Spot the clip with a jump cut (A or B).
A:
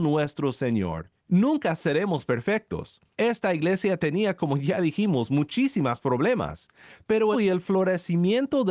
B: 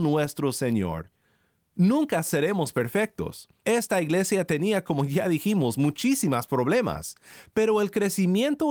A